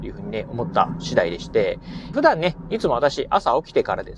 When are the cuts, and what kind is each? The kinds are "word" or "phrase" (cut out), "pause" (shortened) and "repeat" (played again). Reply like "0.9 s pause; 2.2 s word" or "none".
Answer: 2.1 s phrase